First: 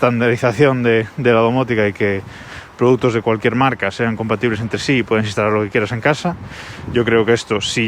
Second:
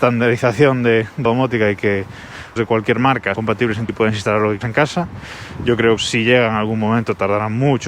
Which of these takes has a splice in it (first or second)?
second